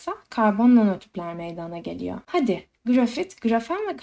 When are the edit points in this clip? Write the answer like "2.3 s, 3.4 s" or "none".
2.2 s